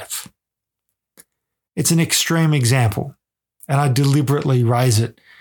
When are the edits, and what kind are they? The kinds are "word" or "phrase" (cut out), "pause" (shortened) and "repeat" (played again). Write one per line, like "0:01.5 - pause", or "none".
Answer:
none